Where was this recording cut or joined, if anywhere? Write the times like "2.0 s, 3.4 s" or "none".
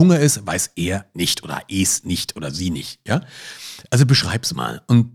none